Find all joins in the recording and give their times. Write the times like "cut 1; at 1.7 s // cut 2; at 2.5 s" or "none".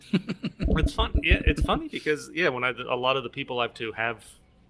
cut 1; at 3.7 s